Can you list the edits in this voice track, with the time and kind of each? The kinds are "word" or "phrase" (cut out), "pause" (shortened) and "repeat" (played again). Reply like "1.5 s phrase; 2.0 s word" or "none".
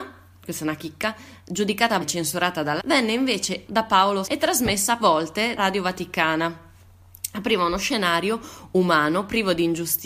2.0 s word; 2.8 s word; 3.7 s word; 4.2 s word; 5.0 s word; 5.6 s word